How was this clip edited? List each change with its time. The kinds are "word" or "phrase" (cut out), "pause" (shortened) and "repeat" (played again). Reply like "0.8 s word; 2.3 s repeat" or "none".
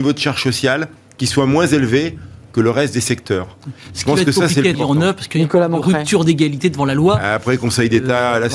4.7 s word